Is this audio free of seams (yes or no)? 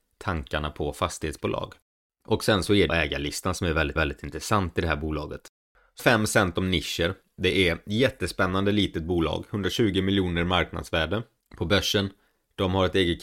no